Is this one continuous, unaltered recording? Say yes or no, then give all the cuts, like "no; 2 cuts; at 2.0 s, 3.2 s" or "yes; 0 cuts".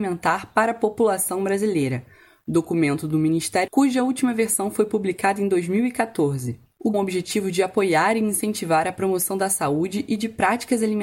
no; 2 cuts; at 3.7 s, 6.9 s